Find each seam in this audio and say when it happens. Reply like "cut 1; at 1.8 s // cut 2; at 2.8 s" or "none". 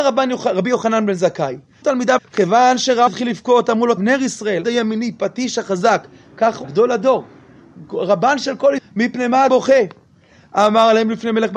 cut 1; at 1.8 s // cut 2; at 2.2 s // cut 3; at 3.1 s // cut 4; at 4.0 s // cut 5; at 4.6 s // cut 6; at 6.6 s // cut 7; at 8.8 s // cut 8; at 9.5 s